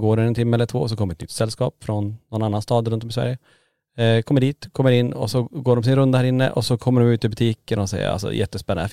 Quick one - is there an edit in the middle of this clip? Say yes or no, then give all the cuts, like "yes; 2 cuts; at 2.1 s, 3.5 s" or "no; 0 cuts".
no; 0 cuts